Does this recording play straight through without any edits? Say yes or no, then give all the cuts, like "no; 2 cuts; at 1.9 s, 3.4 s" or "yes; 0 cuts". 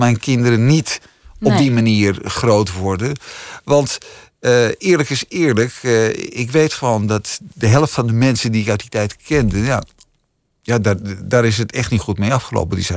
yes; 0 cuts